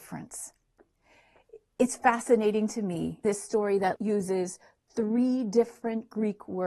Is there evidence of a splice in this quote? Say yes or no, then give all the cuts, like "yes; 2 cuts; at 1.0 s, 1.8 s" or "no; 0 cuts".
yes; 2 cuts; at 3.2 s, 4.0 s